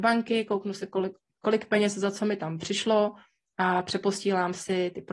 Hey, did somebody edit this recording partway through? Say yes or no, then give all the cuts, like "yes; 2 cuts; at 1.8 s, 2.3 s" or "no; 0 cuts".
no; 0 cuts